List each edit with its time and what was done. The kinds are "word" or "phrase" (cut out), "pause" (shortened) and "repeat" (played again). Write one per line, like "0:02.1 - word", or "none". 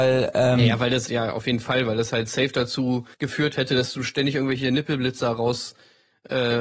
0:01.1 - word
0:03.1 - pause